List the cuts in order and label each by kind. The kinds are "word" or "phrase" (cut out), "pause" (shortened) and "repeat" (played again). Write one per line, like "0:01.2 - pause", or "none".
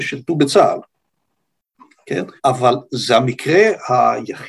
0:02.4 - pause

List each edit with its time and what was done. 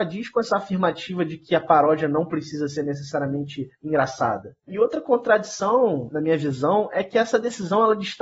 none

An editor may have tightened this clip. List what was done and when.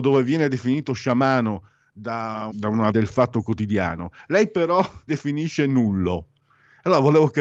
0:02.5 - word
0:02.9 - word
0:05.1 - word

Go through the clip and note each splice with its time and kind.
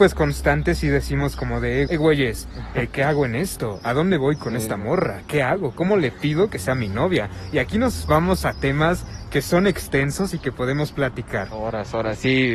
0:01.9 - word

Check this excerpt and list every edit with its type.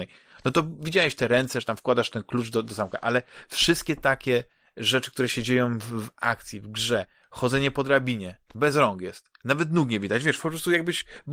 none

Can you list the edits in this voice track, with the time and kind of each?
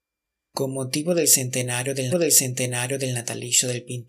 0:02.1 - repeat

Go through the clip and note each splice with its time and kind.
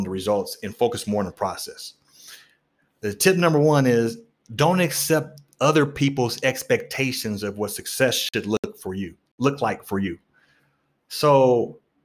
none

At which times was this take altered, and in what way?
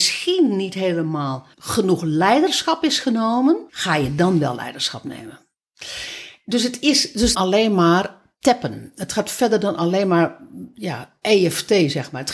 0:01.5 - pause
0:03.7 - pause
0:07.3 - phrase

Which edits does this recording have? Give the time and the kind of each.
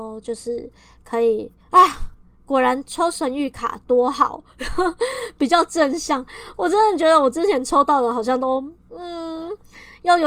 0:01.6 - pause

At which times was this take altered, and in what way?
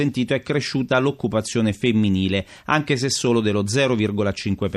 none

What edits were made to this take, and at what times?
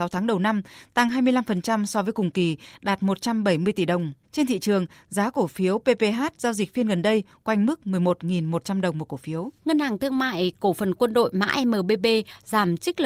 0:04.2 - pause
0:09.6 - pause

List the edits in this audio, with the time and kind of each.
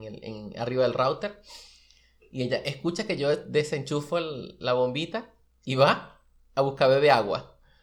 none

